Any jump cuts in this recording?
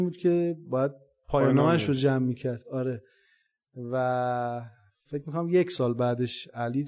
no; 0 cuts

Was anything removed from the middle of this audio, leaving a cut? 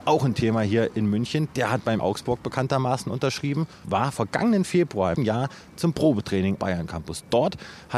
yes; 4 cuts; at 2.0 s, 3.8 s, 5.1 s, 6.6 s

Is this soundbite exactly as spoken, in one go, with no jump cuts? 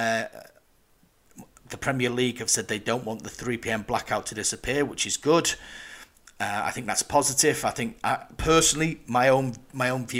yes; 0 cuts

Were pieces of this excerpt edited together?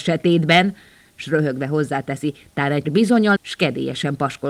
yes; 2 cuts; at 2.8 s, 3.4 s

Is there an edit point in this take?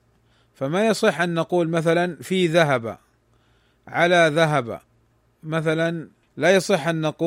no; 0 cuts

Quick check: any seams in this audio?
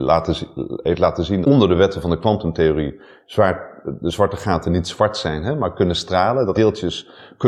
yes; 2 cuts; at 1.4 s, 6.5 s

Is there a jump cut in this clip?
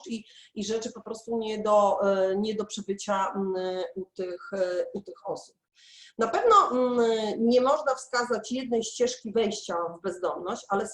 no; 0 cuts

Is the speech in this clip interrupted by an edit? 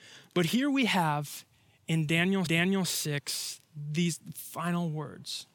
yes; 1 cut; at 2.5 s

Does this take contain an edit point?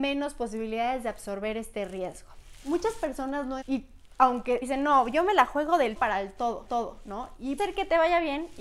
yes; 5 cuts; at 3.6 s, 4.6 s, 6.0 s, 6.7 s, 7.6 s

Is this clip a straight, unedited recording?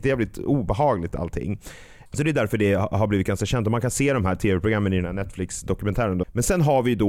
yes; 0 cuts

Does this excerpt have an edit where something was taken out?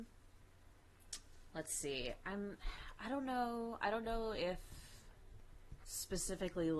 no; 0 cuts

